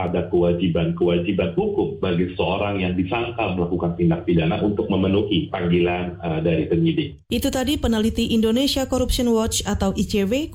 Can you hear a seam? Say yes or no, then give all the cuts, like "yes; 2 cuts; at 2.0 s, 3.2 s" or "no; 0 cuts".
yes; 1 cut; at 7.2 s